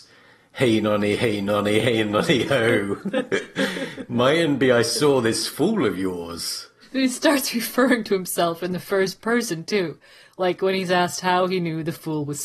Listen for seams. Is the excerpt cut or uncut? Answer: uncut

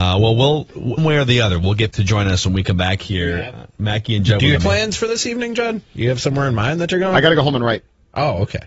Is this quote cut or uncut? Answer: cut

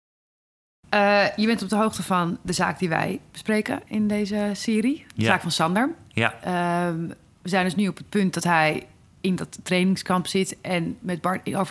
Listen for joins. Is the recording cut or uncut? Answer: uncut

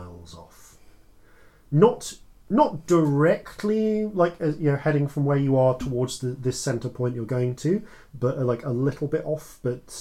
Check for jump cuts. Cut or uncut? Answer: uncut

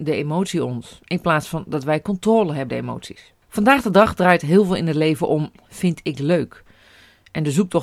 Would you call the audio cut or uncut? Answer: cut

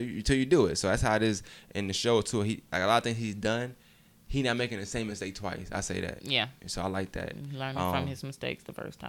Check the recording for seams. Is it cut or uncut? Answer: uncut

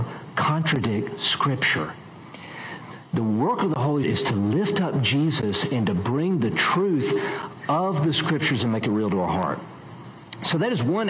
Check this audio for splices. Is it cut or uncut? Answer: cut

